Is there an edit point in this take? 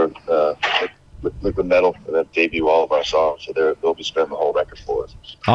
yes; 1 cut; at 2.3 s

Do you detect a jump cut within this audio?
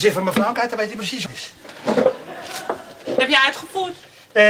yes; 1 cut; at 1.3 s

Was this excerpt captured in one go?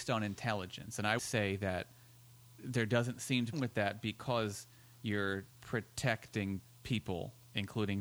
no; 3 cuts; at 1.2 s, 3.5 s, 5.5 s

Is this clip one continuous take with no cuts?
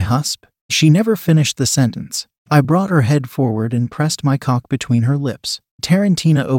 yes; 0 cuts

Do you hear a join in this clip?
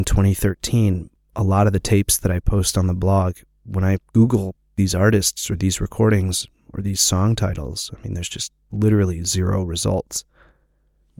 no; 0 cuts

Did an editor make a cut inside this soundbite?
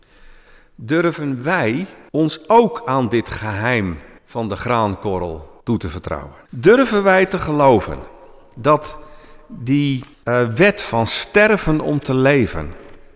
yes; 5 cuts; at 2.1 s, 4.2 s, 5.6 s, 6.5 s, 10.1 s

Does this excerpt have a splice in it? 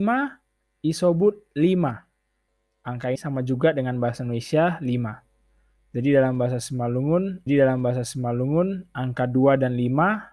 yes; 2 cuts; at 3.1 s, 7.5 s

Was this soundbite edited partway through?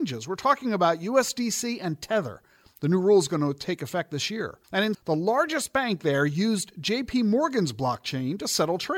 yes; 2 cuts; at 4.6 s, 4.9 s

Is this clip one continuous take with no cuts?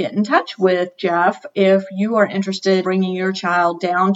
no; 1 cut; at 2.8 s

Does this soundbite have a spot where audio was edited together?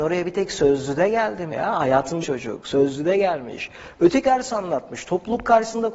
yes; 3 cuts; at 1.5 s, 2.2 s, 4.2 s

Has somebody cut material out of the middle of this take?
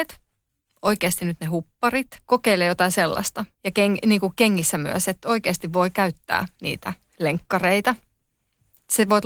yes; 2 cuts; at 2.2 s, 3.5 s

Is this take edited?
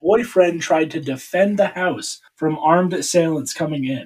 yes; 1 cut; at 2.3 s

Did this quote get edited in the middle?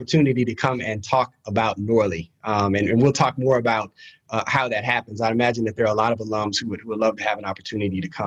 no; 0 cuts

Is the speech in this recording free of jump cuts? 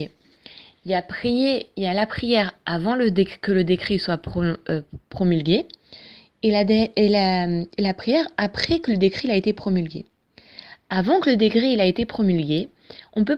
yes; 0 cuts

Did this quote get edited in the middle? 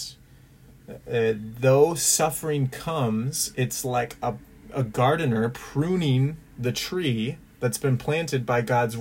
no; 0 cuts

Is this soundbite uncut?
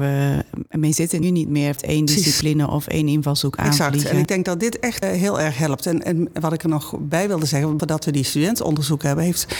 no; 4 cuts; at 1.2 s, 1.8 s, 5.0 s, 7.8 s

